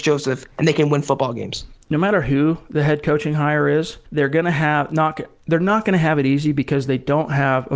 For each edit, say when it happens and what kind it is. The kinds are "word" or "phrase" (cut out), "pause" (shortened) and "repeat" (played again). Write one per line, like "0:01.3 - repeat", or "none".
0:04.1 - pause